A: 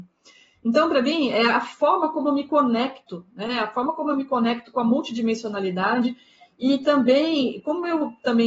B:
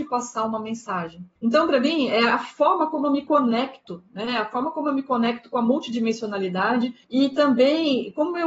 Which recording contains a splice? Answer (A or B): B